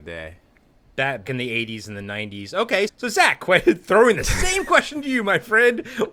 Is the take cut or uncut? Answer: cut